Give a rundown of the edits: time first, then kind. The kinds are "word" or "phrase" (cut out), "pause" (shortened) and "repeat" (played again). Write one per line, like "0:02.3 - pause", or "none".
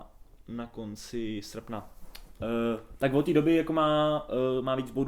none